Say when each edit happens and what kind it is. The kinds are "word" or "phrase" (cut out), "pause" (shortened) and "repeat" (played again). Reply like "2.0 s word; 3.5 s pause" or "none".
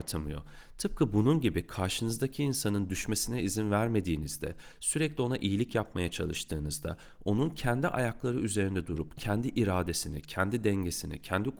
none